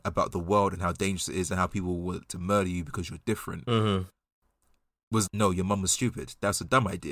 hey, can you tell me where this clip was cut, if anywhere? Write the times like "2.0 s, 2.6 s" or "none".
2.3 s, 5.3 s